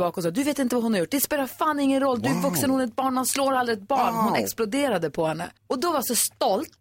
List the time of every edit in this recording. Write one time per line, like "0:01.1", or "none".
0:05.6